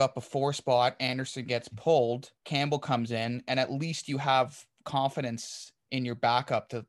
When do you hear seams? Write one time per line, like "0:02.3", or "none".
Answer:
0:02.4